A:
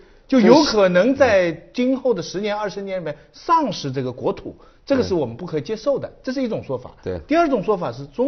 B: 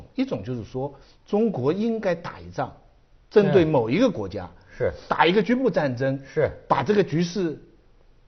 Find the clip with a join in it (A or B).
B